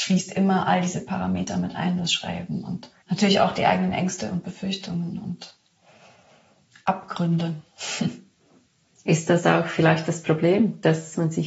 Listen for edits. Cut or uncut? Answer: cut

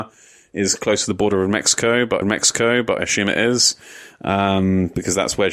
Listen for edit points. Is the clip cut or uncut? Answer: cut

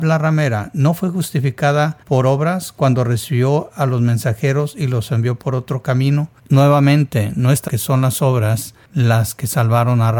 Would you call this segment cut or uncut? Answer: cut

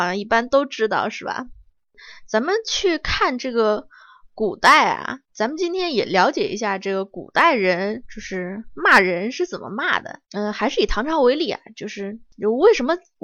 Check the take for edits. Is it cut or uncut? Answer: cut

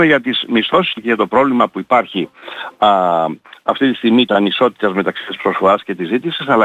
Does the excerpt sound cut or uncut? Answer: cut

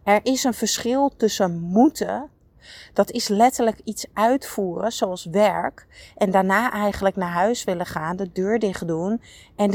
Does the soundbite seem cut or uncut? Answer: uncut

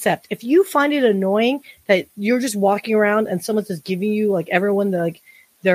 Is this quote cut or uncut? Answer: uncut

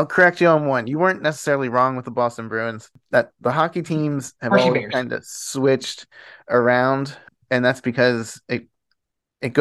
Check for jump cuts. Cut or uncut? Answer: uncut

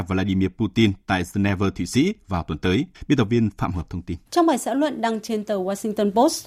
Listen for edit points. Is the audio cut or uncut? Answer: cut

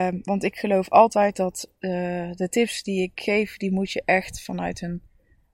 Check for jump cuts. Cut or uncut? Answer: uncut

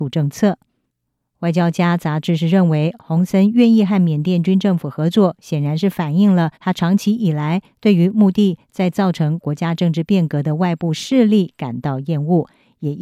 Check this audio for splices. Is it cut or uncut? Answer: cut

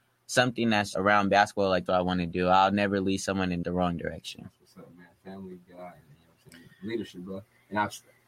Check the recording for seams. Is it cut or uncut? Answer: cut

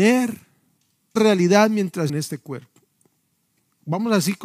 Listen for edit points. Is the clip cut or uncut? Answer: cut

